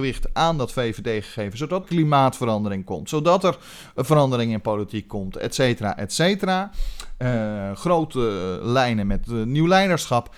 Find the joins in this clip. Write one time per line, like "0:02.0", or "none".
0:01.8